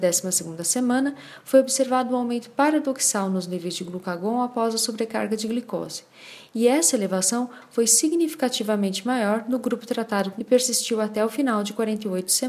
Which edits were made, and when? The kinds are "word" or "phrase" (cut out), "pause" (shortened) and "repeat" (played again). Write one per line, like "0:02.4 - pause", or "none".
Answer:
0:10.4 - phrase